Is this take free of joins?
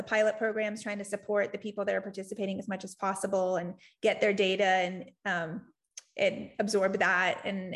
yes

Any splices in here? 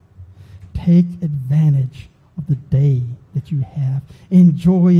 no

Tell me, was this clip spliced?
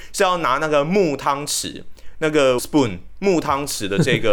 yes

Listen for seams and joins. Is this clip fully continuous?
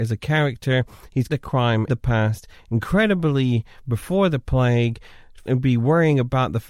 no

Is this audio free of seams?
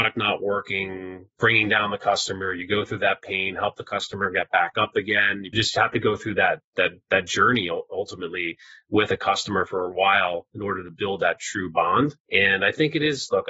yes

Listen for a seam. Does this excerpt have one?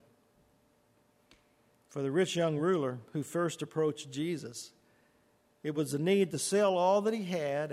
no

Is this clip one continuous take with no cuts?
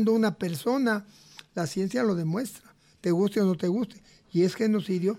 yes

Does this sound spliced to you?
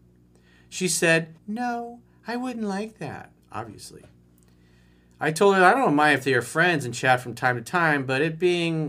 yes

